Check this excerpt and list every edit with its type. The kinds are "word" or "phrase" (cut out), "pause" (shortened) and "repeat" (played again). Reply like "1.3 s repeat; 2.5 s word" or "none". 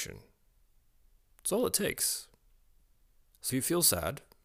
3.5 s word